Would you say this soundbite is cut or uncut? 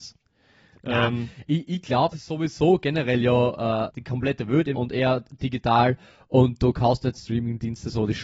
cut